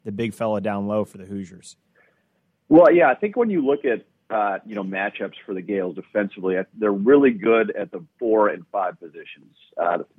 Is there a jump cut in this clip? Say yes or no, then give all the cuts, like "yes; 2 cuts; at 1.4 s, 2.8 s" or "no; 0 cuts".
no; 0 cuts